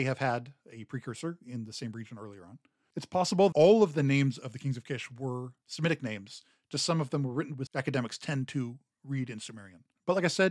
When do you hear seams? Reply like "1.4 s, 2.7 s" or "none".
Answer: 3.5 s, 7.7 s